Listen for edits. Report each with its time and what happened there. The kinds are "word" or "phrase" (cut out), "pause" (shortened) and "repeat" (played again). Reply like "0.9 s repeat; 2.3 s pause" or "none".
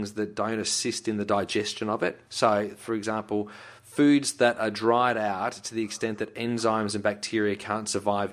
2.3 s pause